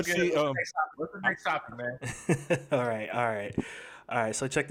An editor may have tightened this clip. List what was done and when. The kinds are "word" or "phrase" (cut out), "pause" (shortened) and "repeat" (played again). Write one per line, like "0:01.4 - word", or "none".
0:00.9 - word